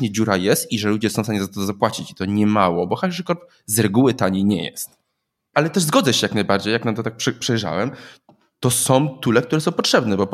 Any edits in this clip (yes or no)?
no